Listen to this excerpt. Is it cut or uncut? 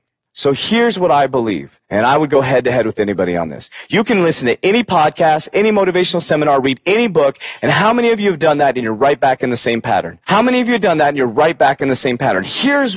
cut